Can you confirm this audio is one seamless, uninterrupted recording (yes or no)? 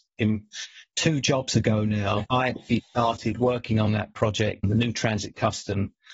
yes